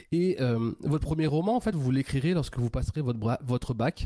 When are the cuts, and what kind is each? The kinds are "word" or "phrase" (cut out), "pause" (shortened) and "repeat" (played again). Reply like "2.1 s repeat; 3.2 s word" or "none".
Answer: none